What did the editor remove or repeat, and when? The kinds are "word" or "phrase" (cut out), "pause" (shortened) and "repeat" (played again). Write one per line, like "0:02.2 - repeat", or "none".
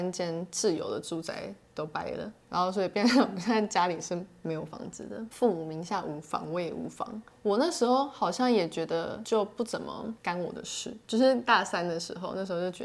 0:05.3 - word